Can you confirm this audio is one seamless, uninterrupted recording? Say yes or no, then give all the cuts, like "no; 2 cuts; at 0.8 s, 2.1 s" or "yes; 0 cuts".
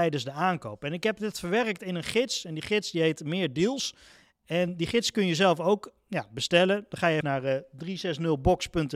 no; 1 cut; at 7.2 s